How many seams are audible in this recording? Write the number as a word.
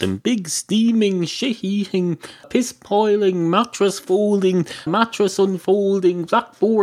two